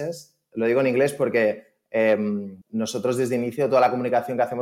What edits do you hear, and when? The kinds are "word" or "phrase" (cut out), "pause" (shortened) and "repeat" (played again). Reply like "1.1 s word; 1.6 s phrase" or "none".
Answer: 2.6 s pause